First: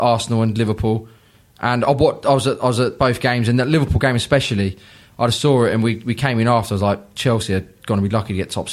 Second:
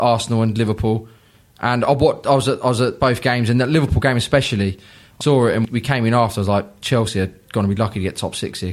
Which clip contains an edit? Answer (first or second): second